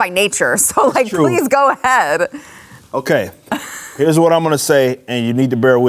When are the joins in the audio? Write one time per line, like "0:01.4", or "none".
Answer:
none